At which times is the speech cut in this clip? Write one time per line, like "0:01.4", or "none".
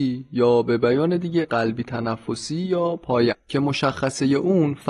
0:01.4
0:03.3